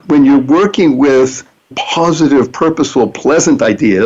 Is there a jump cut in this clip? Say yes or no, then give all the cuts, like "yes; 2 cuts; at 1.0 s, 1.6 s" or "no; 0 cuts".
yes; 1 cut; at 1.7 s